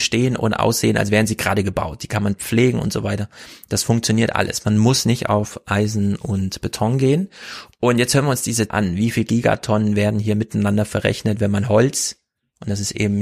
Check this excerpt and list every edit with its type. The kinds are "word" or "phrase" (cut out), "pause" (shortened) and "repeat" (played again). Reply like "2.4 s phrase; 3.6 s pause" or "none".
8.7 s phrase